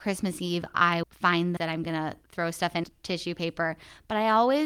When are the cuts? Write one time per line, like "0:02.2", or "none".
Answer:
0:01.0
0:01.6
0:02.2
0:02.8